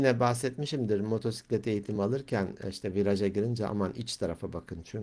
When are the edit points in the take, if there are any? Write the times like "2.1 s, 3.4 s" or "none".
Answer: none